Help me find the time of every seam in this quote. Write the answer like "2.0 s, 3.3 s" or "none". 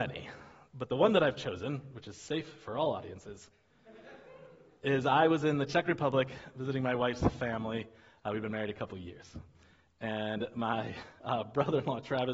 none